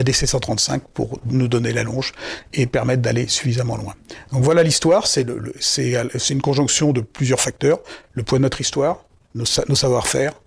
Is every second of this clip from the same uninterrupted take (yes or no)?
yes